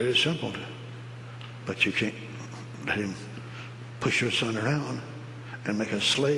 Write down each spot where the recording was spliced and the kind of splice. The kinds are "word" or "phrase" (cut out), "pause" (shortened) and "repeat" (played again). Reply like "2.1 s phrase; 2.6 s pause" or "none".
none